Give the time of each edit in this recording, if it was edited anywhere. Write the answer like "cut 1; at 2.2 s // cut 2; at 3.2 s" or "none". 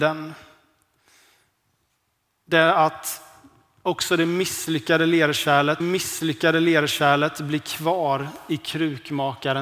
cut 1; at 5.8 s

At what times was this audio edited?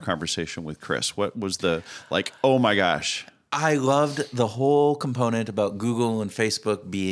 none

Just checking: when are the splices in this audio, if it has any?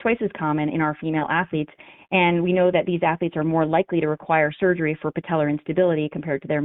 none

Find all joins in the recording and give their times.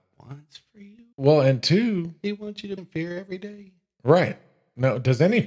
cut 1; at 1.1 s // cut 2; at 2.8 s

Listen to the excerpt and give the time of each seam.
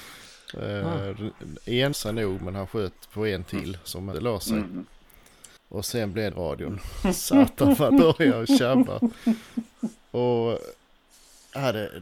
cut 1; at 1.9 s // cut 2; at 4.1 s // cut 3; at 5.6 s // cut 4; at 6.3 s // cut 5; at 7.9 s

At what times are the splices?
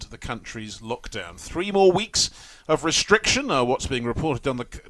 none

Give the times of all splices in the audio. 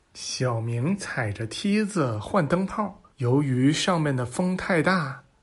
cut 1; at 3.1 s

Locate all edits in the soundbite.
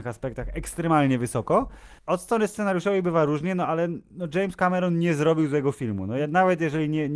cut 1; at 2.0 s

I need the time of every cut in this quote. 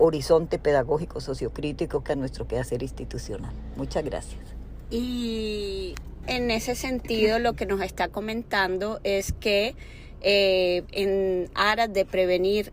cut 1; at 2.1 s // cut 2; at 6.2 s

